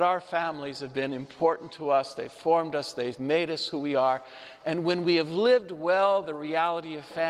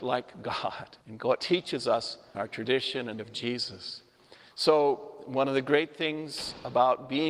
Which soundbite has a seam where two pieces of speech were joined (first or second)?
second